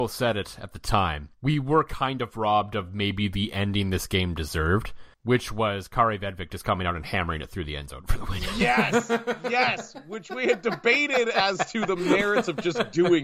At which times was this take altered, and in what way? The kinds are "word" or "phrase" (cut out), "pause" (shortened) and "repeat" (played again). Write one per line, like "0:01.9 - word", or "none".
0:01.3 - pause
0:05.1 - pause